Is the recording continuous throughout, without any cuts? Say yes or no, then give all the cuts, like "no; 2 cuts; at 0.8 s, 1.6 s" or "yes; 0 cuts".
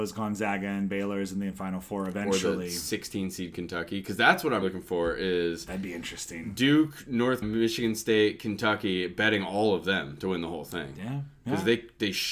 no; 2 cuts; at 4.6 s, 7.4 s